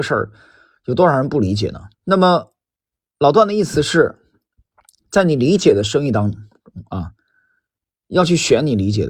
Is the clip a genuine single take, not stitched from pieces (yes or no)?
no